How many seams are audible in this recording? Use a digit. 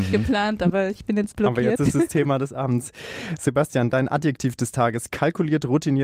1